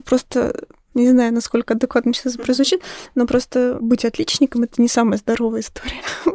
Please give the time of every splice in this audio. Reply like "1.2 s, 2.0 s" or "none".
none